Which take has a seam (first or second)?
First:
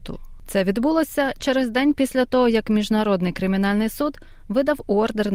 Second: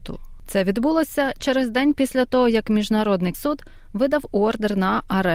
second